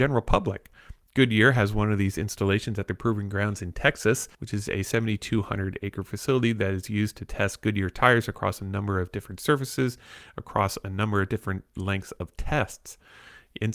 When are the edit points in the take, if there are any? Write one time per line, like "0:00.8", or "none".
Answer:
0:04.3